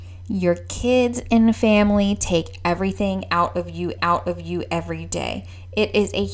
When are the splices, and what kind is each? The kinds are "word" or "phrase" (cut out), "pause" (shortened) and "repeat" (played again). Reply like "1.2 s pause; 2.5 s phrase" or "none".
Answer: 4.0 s repeat